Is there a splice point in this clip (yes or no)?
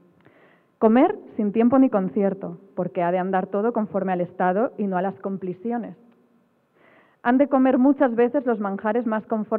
no